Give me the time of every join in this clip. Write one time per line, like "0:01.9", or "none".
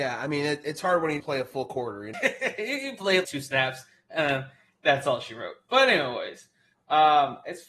0:01.2
0:02.1
0:03.2